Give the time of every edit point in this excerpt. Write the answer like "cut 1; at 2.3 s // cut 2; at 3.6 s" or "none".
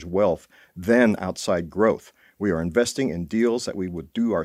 none